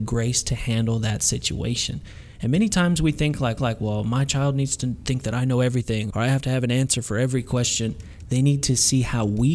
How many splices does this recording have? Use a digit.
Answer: 2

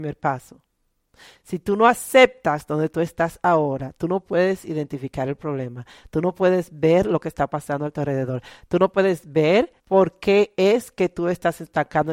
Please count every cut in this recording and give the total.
1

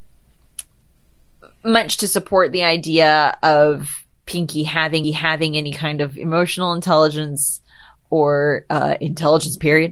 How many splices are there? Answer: 2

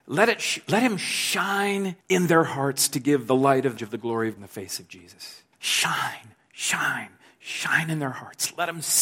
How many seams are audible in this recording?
4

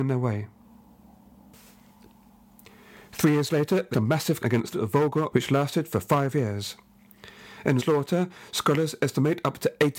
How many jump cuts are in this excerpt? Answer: 5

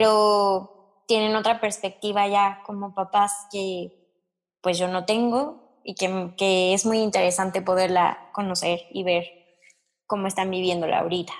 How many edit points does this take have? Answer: 0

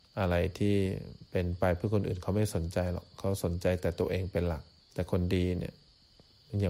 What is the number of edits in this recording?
1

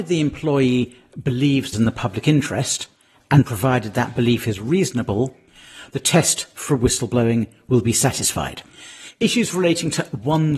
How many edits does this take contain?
1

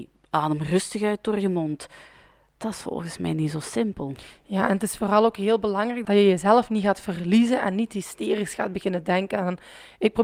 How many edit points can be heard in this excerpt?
0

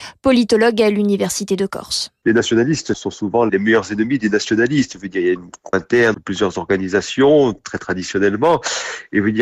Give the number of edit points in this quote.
2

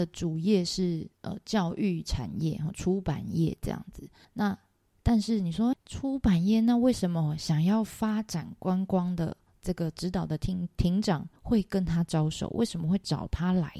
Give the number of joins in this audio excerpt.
4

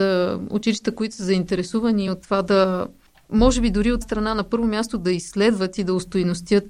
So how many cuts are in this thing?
2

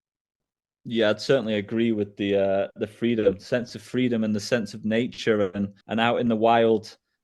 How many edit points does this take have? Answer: 1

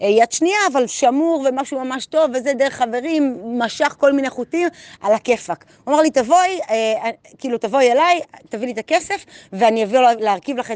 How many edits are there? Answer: 0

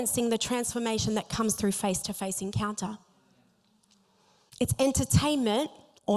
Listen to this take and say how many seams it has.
0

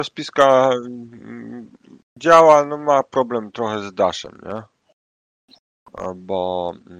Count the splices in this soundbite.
0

